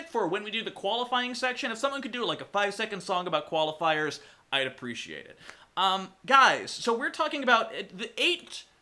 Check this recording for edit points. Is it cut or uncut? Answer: uncut